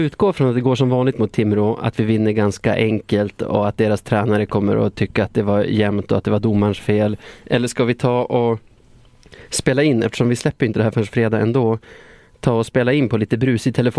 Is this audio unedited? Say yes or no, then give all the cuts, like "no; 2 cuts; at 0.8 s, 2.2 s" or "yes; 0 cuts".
yes; 0 cuts